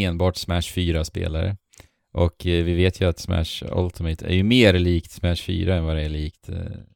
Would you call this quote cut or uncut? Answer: uncut